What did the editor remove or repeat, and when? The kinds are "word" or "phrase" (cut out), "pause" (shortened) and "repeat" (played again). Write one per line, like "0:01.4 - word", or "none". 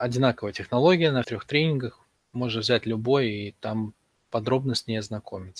0:01.2 - word

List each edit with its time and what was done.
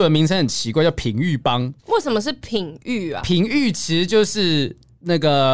0:01.8 - pause

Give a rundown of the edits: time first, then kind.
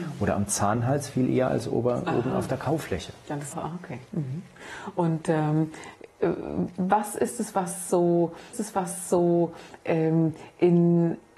0:03.5 - phrase
0:08.5 - repeat

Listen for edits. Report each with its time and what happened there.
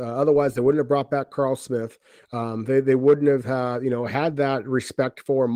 none

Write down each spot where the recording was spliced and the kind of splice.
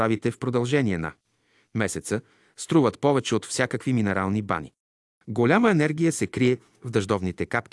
none

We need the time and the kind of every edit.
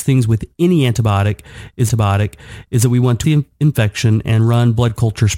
0:01.9 - repeat
0:03.2 - word

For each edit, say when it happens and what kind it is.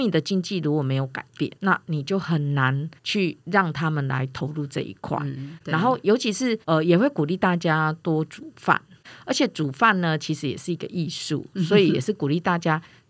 0:01.6 - pause
0:03.0 - pause
0:06.6 - pause

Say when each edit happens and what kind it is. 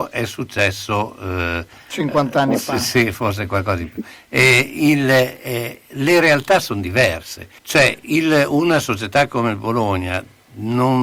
0:07.6 - pause

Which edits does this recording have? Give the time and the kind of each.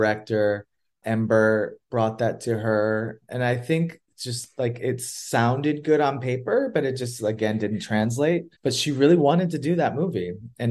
0:03.2 - pause
0:08.5 - pause

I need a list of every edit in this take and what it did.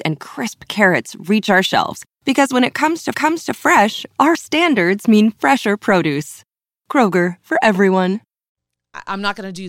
0:03.1 - repeat
0:04.3 - word
0:07.4 - word

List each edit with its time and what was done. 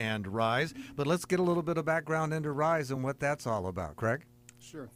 none

